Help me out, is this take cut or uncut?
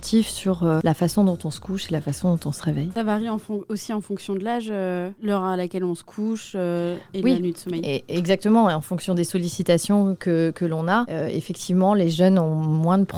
uncut